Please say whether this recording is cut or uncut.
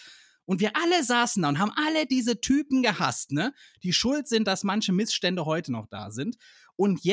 uncut